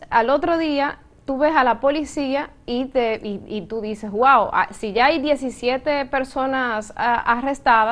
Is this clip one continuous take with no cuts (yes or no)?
yes